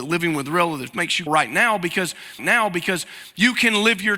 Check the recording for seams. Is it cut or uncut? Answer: cut